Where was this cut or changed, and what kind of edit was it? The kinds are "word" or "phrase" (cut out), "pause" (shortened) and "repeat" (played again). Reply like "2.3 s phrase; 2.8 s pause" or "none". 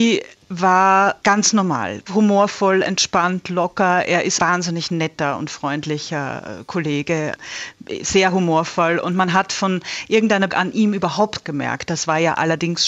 1.2 s pause; 4.4 s word; 10.5 s word; 11.4 s phrase